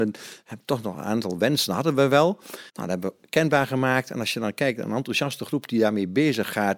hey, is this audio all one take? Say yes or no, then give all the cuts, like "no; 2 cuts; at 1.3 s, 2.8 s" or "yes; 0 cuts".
no; 1 cut; at 2.7 s